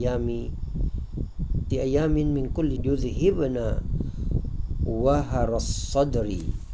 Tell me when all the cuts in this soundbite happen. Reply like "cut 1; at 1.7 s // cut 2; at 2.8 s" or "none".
cut 1; at 1.7 s // cut 2; at 2.8 s